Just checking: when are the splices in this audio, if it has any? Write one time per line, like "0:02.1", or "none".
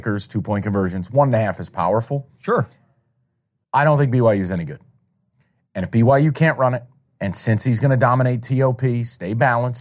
none